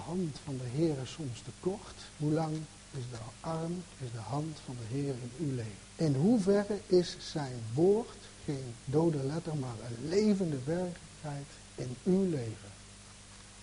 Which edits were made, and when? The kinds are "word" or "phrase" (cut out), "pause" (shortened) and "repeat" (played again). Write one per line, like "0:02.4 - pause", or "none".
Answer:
0:02.1 - pause
0:05.8 - pause
0:08.8 - pause